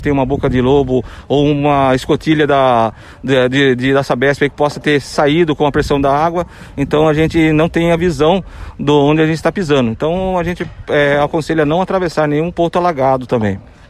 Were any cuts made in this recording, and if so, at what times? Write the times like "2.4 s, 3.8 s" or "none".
none